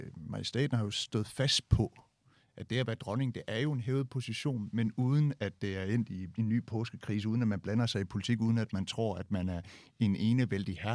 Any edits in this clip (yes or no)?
no